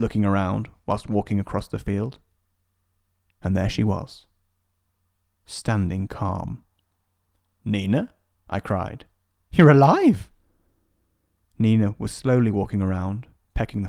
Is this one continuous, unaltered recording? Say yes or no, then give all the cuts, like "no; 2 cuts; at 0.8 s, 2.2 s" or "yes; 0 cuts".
yes; 0 cuts